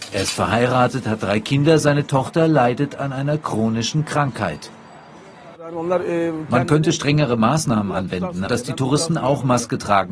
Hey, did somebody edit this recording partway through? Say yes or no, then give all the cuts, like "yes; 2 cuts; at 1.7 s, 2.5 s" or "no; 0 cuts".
yes; 1 cut; at 8.5 s